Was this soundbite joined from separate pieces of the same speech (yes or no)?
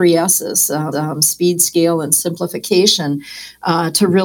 yes